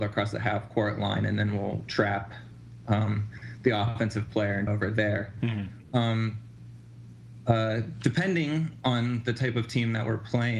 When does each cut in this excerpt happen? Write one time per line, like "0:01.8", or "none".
0:04.7